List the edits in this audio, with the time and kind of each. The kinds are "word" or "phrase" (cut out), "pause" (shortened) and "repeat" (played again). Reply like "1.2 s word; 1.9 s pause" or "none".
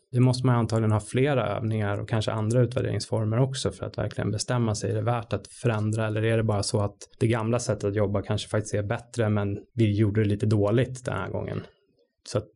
7.1 s pause; 9.7 s pause